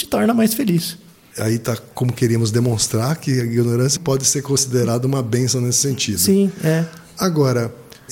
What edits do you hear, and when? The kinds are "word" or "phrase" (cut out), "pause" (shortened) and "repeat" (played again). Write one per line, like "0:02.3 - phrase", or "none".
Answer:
0:04.0 - word